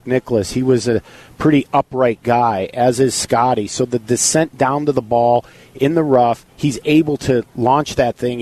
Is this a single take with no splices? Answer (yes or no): yes